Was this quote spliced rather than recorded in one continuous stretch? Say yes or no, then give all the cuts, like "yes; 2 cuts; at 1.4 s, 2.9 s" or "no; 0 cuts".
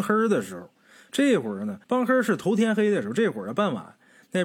yes; 1 cut; at 1.8 s